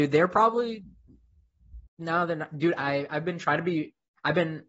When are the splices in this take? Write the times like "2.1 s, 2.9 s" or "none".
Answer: 1.9 s, 2.8 s